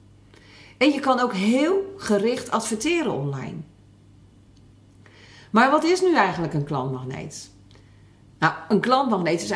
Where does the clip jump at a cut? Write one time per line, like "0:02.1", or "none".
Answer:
none